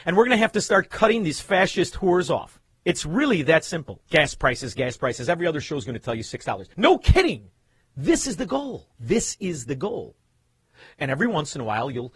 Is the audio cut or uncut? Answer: cut